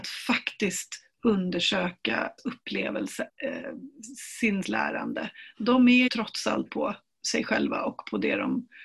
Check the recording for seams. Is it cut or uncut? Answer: cut